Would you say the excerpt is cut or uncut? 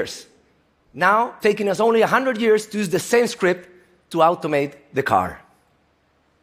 cut